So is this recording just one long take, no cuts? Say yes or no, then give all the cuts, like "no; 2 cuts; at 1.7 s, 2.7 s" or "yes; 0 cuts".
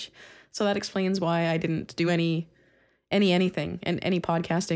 yes; 0 cuts